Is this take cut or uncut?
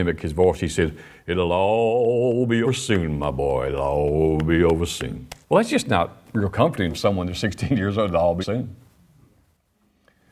cut